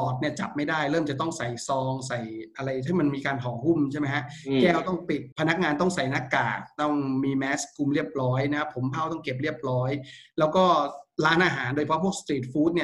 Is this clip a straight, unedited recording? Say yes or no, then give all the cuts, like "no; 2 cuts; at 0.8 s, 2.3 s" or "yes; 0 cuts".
no; 1 cut; at 5.3 s